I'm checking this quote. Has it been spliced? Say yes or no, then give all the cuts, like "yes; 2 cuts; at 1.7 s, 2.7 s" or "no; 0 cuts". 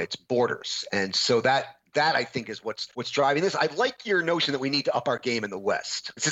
yes; 1 cut; at 2.9 s